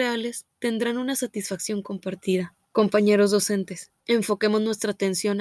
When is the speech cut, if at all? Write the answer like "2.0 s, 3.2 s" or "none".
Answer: 2.6 s, 4.0 s